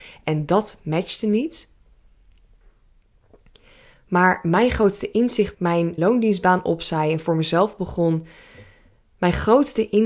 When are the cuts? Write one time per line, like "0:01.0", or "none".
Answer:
0:05.5
0:06.0